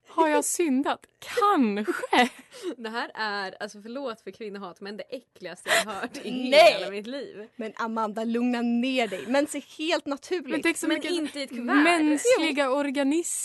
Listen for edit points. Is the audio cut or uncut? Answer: uncut